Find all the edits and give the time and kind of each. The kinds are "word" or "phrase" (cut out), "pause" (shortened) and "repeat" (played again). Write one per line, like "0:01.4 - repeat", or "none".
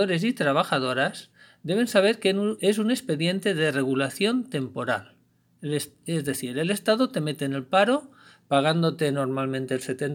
0:02.6 - word